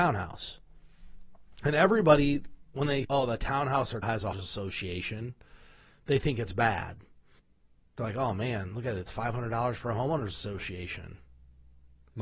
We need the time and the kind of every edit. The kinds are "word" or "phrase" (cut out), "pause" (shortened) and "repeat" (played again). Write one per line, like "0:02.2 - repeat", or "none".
0:03.0 - word
0:04.0 - word
0:04.3 - word
0:07.4 - pause